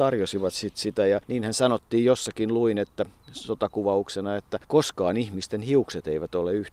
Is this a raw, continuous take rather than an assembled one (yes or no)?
no